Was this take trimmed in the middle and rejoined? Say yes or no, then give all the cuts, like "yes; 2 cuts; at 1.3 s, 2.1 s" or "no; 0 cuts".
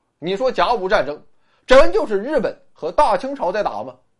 no; 0 cuts